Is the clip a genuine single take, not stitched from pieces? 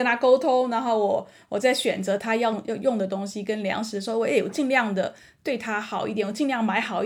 yes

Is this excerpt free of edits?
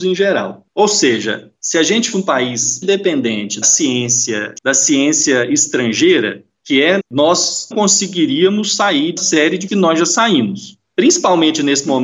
no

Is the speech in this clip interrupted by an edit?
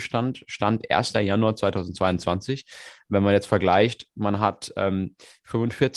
no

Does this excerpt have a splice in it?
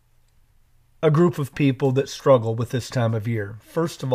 no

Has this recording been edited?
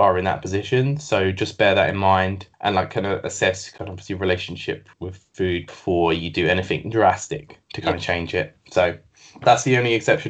yes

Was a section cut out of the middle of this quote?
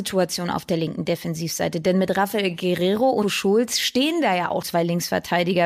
yes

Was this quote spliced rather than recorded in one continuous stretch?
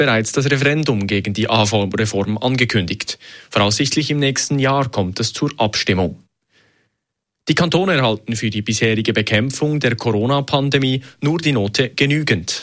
no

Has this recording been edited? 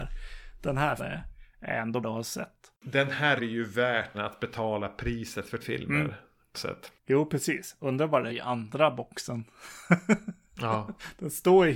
yes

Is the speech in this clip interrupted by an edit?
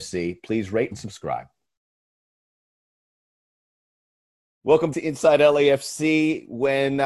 yes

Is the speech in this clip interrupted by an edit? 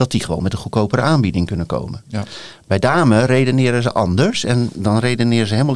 no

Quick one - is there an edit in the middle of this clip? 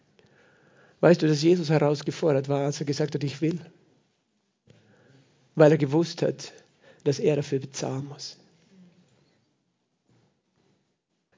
no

